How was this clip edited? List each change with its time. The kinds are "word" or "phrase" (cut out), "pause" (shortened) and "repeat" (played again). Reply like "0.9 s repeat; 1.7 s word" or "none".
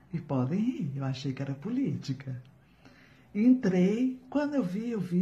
none